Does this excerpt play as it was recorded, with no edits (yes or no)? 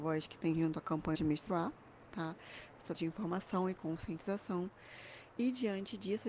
no